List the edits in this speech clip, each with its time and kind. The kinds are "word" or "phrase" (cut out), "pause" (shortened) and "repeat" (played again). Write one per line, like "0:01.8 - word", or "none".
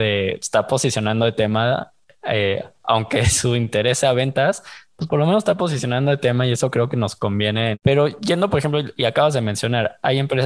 none

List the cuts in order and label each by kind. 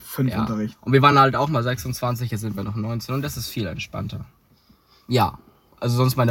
none

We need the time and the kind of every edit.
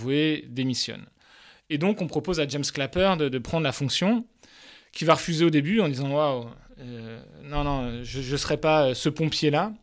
none

